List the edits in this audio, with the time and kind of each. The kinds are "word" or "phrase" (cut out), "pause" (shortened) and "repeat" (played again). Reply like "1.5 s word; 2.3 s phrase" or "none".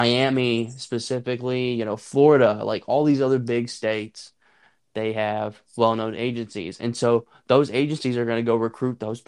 5.7 s pause

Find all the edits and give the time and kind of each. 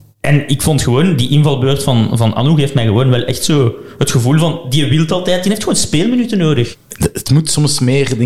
none

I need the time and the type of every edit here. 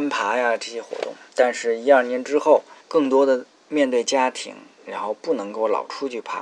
1.3 s pause; 2.8 s pause; 3.5 s pause

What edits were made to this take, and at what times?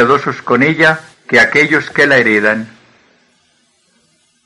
1.1 s pause

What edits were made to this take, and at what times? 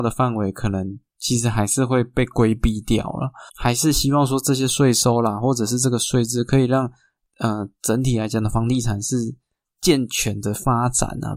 3.5 s pause; 9.6 s pause

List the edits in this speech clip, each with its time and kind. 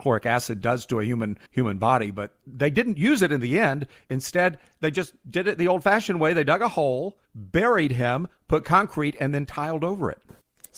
1.5 s pause; 7.2 s pause

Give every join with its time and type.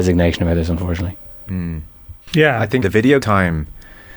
2.2 s pause; 2.8 s word; 3.2 s word

